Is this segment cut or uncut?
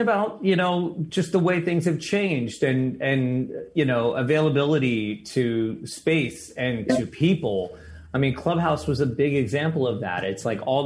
uncut